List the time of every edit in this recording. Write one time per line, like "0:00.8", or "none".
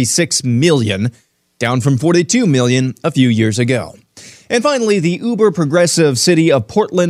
none